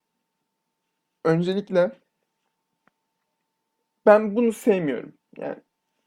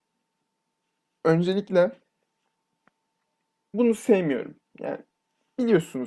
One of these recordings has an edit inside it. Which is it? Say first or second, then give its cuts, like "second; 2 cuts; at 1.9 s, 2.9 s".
second; 1 cut; at 3.7 s